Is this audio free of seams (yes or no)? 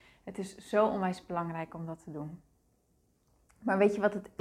yes